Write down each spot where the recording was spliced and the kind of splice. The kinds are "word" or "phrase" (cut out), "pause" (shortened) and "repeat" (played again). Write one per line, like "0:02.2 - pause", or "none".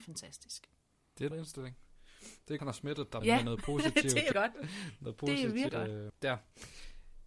0:01.3 - word
0:02.6 - word
0:03.2 - word
0:04.3 - word
0:05.7 - word
0:06.1 - word